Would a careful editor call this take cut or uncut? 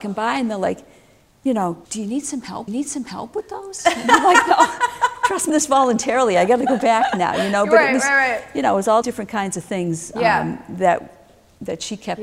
cut